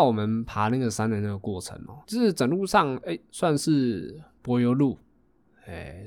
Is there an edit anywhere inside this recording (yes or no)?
yes